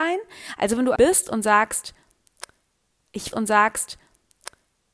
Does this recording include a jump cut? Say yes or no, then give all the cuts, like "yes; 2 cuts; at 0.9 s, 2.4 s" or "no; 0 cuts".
yes; 2 cuts; at 1.0 s, 3.3 s